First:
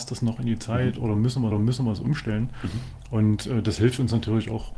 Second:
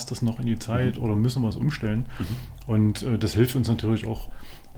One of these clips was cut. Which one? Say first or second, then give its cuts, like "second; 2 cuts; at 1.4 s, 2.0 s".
first; 1 cut; at 1.5 s